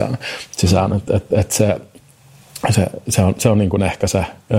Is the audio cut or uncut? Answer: uncut